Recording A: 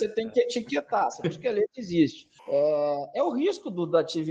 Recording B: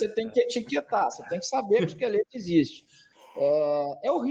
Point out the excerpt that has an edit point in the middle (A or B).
A